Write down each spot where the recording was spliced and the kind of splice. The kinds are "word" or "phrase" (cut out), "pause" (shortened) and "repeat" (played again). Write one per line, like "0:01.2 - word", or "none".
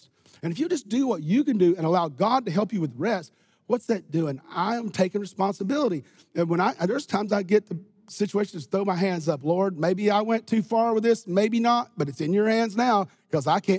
none